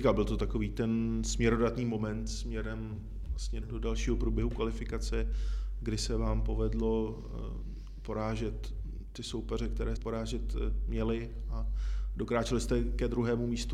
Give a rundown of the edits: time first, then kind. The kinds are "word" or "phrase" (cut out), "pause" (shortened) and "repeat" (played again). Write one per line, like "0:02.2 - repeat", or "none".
0:03.6 - word
0:10.0 - word